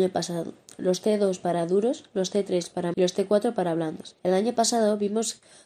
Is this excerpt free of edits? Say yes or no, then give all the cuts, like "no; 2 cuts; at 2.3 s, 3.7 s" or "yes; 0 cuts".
no; 2 cuts; at 2.9 s, 4.2 s